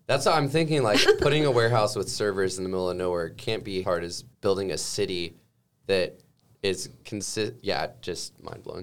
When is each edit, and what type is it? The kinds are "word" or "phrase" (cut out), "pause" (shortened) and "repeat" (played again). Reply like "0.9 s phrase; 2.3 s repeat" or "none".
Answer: 1.1 s word; 3.8 s phrase; 4.3 s pause